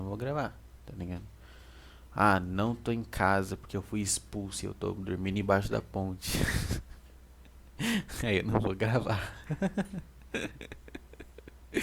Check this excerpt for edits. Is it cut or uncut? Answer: uncut